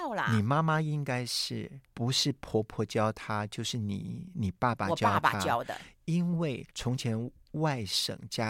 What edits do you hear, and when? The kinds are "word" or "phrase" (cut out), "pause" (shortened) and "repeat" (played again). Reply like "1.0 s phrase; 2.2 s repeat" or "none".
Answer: 1.8 s pause; 6.7 s pause